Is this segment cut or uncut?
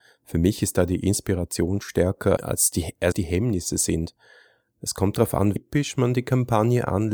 cut